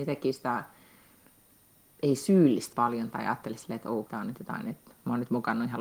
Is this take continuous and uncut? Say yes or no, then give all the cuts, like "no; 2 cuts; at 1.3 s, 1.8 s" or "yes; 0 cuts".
no; 2 cuts; at 2.7 s, 4.1 s